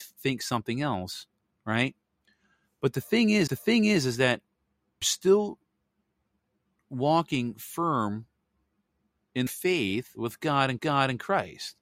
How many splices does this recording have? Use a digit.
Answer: 4